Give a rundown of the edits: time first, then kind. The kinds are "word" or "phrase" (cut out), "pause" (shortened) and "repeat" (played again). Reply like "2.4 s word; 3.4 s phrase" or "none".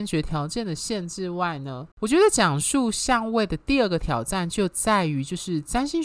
1.9 s pause